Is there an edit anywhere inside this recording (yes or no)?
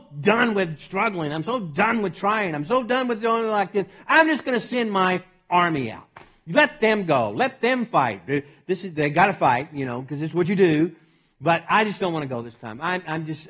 no